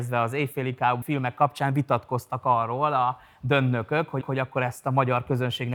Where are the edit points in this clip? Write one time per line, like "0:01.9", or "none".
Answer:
0:01.0
0:04.2